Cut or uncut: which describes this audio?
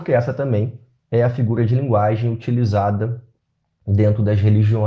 uncut